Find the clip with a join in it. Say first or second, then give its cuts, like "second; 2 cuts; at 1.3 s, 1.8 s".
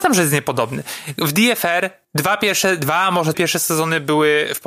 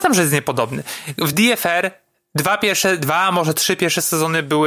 first; 2 cuts; at 2.0 s, 3.3 s